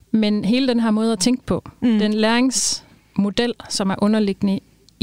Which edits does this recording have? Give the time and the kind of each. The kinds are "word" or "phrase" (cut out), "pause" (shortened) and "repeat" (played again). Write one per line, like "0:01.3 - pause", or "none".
none